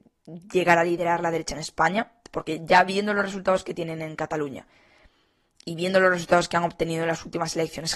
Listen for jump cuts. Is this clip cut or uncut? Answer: uncut